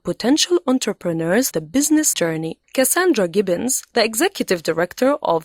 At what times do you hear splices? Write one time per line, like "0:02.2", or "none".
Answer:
0:01.5
0:02.1
0:02.6